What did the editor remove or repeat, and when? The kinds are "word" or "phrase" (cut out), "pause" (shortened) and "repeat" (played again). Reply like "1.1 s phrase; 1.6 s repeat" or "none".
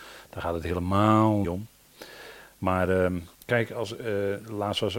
1.4 s word; 3.3 s pause